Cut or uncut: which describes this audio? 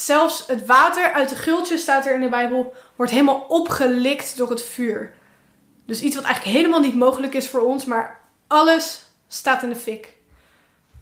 uncut